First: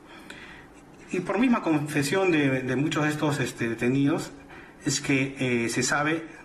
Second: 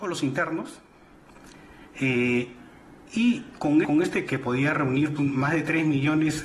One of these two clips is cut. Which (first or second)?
second